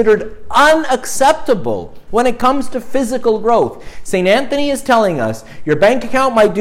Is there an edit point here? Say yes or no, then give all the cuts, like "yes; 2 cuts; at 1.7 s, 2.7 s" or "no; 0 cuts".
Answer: no; 0 cuts